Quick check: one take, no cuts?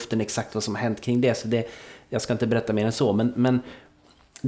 yes; 0 cuts

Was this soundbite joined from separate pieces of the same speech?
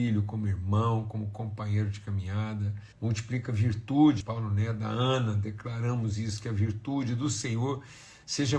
yes; 2 cuts; at 2.9 s, 4.2 s

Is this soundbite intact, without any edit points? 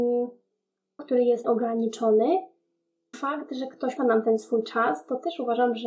no; 4 cuts; at 1.0 s, 1.4 s, 3.1 s, 4.0 s

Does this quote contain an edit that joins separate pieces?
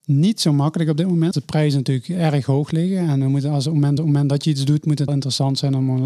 yes; 3 cuts; at 1.3 s, 4.0 s, 5.1 s

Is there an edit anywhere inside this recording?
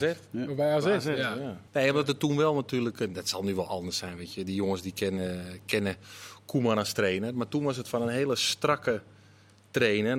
yes; 1 cut; at 1.7 s

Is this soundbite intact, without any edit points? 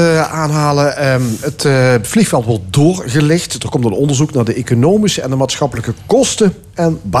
yes; 0 cuts

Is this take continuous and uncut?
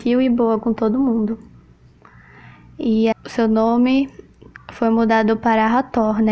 no; 2 cuts; at 3.1 s, 4.6 s

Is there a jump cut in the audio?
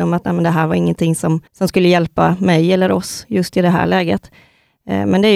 yes; 1 cut; at 1.5 s

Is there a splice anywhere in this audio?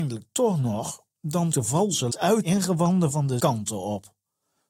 yes; 4 cuts; at 1.5 s, 2.1 s, 2.4 s, 3.4 s

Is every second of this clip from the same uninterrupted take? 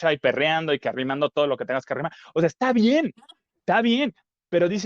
yes; 0 cuts

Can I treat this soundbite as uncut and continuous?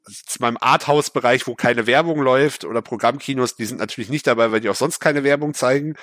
yes; 0 cuts

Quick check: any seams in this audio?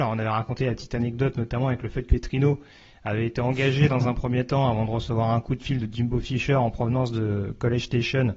yes; 1 cut; at 2.1 s

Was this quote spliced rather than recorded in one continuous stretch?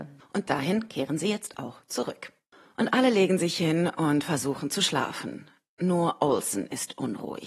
no; 0 cuts

